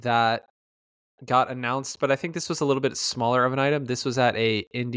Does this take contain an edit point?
no; 0 cuts

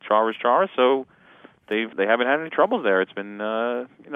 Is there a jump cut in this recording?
yes; 1 cut; at 1.9 s

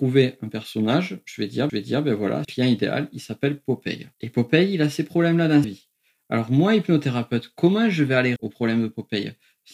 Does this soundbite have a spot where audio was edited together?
yes; 5 cuts; at 1.7 s, 2.4 s, 4.1 s, 5.6 s, 8.4 s

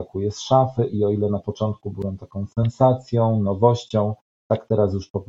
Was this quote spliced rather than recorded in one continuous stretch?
no; 0 cuts

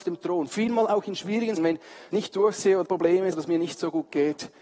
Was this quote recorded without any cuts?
no; 4 cuts; at 1.6 s, 2.1 s, 2.8 s, 3.3 s

